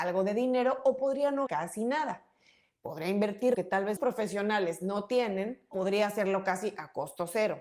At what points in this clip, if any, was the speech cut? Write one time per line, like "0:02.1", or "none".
0:01.5
0:03.5
0:04.0
0:05.7